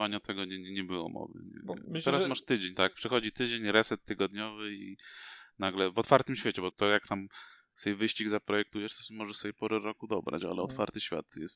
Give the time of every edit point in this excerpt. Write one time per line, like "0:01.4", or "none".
0:06.7